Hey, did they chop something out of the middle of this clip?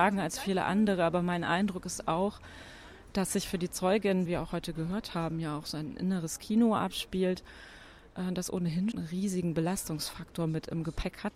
yes; 2 cuts; at 4.3 s, 8.9 s

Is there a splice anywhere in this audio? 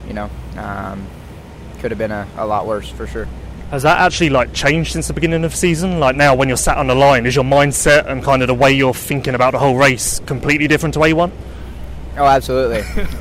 no; 0 cuts

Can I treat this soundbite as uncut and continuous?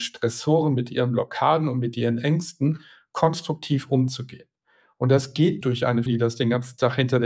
no; 2 cuts; at 5.6 s, 6.1 s

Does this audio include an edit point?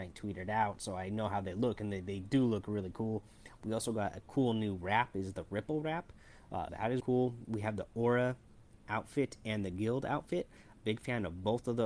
yes; 2 cuts; at 6.7 s, 7.0 s

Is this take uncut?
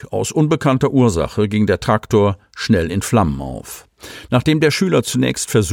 yes; 0 cuts

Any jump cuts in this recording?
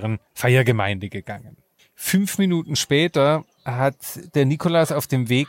no; 0 cuts

